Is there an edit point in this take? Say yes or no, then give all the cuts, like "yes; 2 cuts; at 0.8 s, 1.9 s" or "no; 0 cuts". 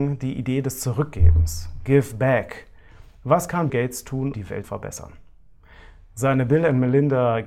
yes; 3 cuts; at 3.7 s, 4.3 s, 4.6 s